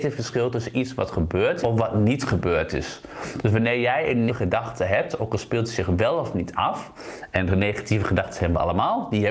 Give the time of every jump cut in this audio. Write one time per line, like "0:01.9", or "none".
0:01.6
0:04.3